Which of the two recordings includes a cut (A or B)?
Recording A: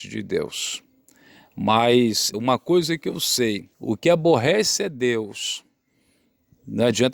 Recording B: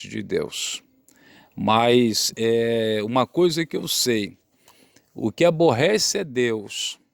A